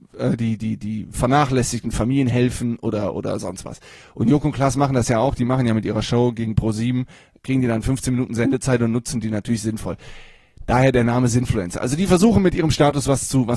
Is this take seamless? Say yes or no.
yes